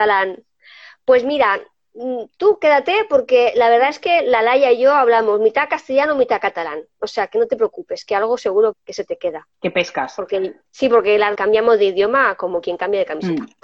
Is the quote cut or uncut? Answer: cut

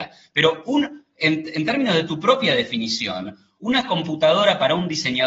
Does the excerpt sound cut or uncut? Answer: uncut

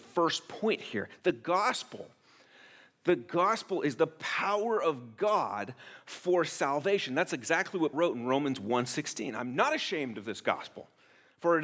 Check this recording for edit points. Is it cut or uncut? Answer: cut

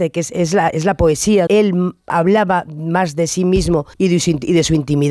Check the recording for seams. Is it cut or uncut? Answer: cut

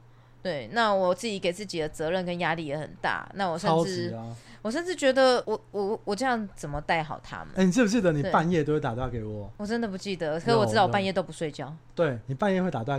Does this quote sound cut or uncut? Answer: uncut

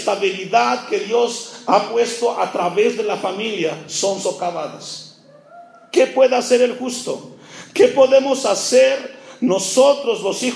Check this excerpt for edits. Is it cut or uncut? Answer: uncut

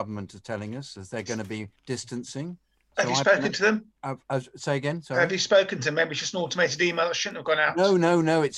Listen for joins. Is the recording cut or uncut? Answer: cut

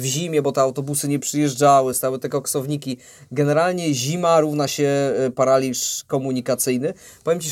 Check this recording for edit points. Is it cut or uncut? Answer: uncut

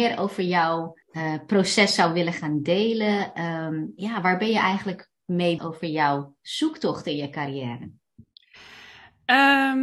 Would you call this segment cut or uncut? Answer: cut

